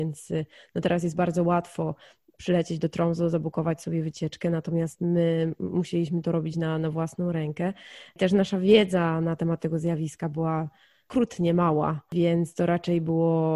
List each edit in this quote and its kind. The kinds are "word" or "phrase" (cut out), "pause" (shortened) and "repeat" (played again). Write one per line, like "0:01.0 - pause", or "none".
none